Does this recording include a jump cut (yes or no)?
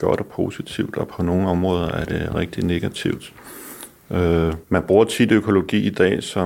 yes